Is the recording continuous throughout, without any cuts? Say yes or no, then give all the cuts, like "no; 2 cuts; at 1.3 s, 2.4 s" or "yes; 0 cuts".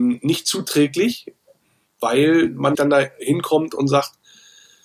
no; 2 cuts; at 1.6 s, 2.7 s